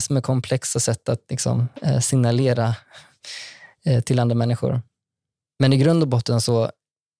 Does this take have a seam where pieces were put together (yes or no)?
no